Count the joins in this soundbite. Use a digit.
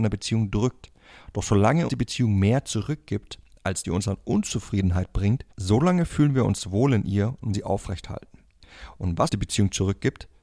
5